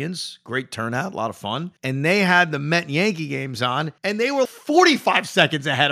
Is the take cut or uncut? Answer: cut